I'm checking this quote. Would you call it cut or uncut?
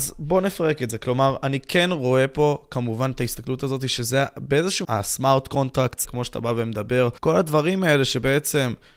cut